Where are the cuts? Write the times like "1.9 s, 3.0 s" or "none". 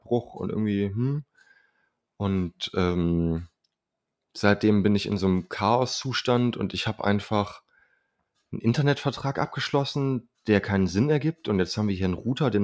none